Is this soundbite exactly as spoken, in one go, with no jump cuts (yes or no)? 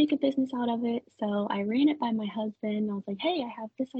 yes